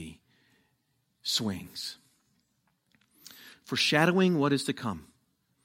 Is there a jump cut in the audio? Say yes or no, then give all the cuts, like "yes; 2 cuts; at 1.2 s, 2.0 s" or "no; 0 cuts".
no; 0 cuts